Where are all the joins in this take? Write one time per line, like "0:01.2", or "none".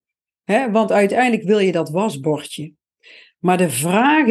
none

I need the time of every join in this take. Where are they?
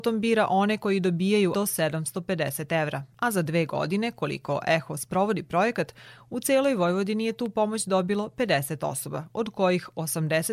0:01.5

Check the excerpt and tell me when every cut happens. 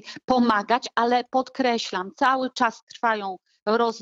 none

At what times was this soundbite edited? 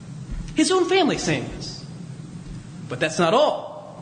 none

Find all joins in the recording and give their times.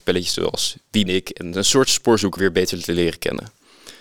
0:01.1
0:02.4

